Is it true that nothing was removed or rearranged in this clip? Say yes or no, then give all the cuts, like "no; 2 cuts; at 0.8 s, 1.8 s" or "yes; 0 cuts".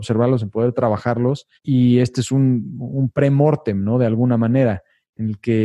no; 1 cut; at 1.6 s